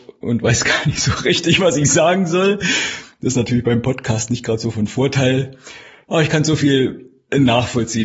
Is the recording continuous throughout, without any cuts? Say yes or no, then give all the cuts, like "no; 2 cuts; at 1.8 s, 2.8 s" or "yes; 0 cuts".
yes; 0 cuts